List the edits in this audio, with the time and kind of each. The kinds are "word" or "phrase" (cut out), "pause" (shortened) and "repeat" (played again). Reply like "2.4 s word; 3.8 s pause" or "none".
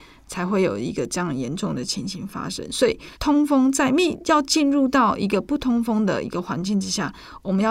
3.1 s pause